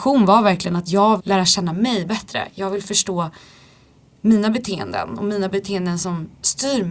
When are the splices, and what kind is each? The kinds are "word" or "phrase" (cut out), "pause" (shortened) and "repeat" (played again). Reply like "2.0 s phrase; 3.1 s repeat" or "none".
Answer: 1.2 s word